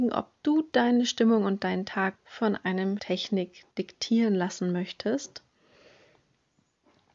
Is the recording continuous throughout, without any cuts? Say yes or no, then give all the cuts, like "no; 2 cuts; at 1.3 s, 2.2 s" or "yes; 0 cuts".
no; 3 cuts; at 2.2 s, 3.0 s, 3.7 s